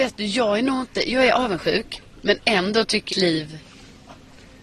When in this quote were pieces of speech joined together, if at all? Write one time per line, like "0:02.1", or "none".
0:03.1